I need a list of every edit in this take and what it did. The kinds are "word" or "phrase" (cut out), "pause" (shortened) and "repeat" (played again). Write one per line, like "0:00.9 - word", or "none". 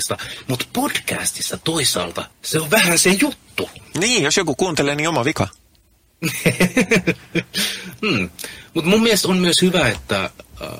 0:02.3 - pause